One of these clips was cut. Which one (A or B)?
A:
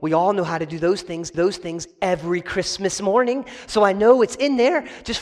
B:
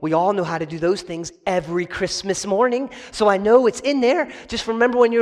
A